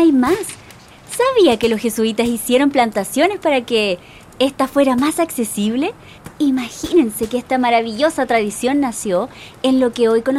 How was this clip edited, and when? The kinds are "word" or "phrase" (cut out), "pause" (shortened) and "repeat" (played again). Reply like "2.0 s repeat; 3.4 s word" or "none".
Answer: none